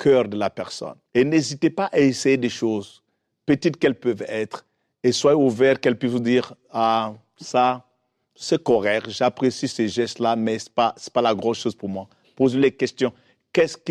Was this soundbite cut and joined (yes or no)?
yes